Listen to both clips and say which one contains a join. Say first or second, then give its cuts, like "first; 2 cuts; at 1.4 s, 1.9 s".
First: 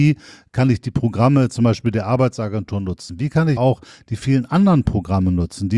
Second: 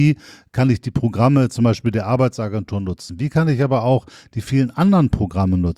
first; 1 cut; at 3.6 s